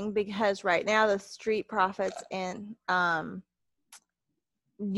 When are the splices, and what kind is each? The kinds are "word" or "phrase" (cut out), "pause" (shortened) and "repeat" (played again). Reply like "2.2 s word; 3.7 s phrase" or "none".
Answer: none